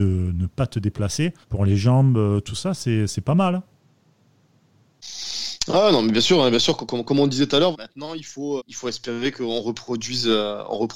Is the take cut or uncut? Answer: cut